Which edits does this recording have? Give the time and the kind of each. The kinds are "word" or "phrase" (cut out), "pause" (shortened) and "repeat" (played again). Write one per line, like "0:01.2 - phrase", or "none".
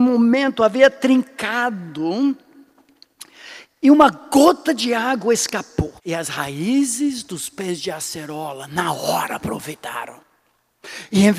0:06.0 - pause